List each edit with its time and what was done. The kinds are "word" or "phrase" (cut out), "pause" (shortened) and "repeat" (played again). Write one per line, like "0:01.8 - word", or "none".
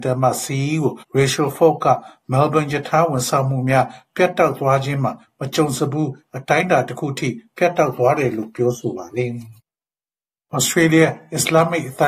0:01.0 - pause
0:09.6 - pause

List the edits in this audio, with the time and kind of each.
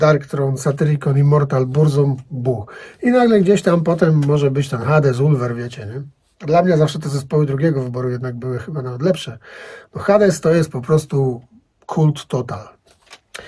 none

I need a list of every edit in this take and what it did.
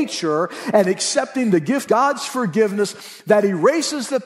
0:01.9 - word

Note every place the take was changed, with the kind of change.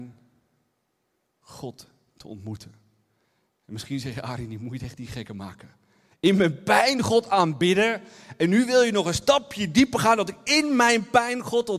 none

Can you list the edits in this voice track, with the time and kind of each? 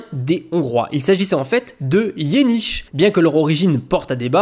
0:02.9 - pause

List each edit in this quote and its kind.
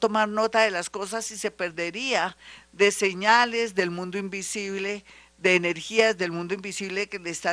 none

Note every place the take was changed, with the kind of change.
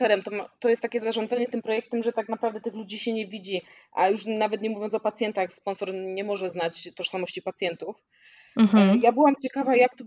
none

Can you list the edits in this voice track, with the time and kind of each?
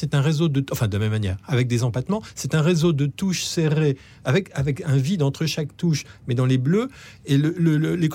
none

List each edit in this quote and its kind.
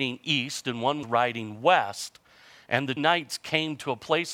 0:01.0 - word
0:03.0 - word

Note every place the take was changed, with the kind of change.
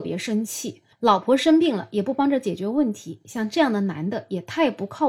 0:00.9 - pause

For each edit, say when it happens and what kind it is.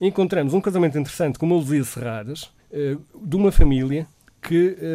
0:02.6 - pause

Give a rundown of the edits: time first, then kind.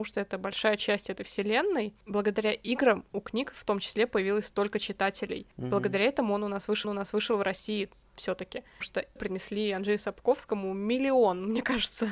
0:06.8 - repeat
0:08.8 - word
0:09.2 - word

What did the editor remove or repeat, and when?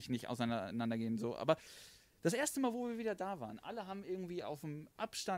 none

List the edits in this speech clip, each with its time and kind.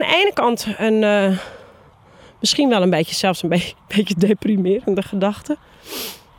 none

